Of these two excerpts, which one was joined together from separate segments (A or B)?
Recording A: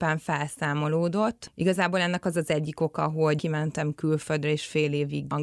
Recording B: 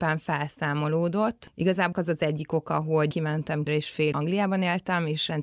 B